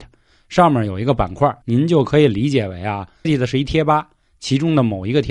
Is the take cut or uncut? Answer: cut